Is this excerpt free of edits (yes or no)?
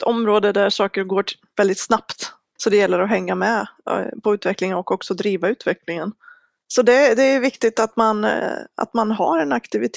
yes